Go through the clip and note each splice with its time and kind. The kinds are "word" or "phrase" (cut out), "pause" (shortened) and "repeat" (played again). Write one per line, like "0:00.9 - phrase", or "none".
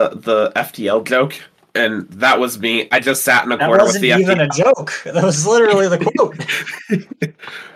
none